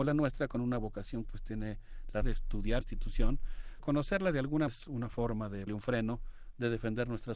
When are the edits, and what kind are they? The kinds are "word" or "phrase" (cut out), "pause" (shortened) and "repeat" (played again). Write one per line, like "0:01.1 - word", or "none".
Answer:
0:01.2 - word
0:02.2 - word
0:02.8 - word
0:03.8 - word
0:04.7 - word
0:05.7 - word